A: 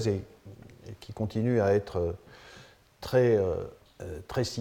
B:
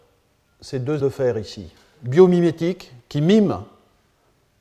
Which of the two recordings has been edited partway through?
B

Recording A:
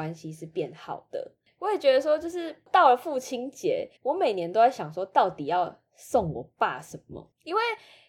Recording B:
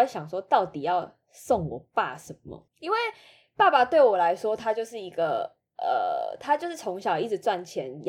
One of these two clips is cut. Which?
A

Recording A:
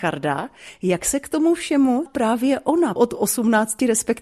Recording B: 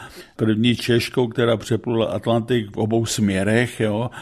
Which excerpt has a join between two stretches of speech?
A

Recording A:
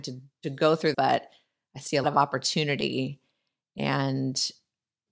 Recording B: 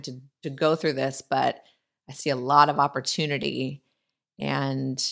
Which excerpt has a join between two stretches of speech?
A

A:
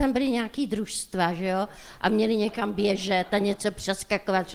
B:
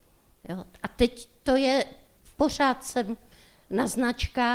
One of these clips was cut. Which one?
B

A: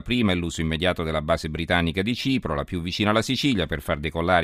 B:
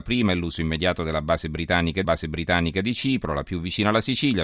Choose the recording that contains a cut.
B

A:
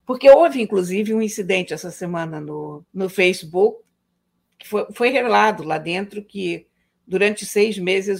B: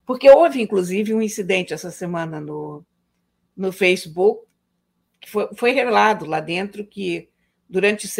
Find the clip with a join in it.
A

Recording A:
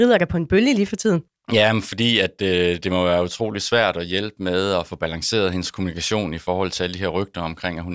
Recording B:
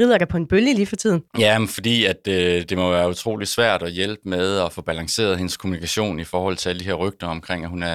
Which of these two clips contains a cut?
B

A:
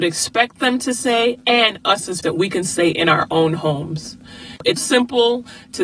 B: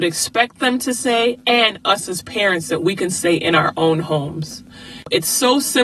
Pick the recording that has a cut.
A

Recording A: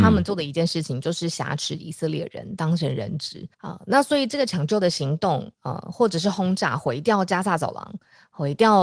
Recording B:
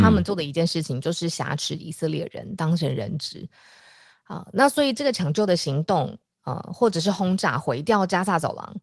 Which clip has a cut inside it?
A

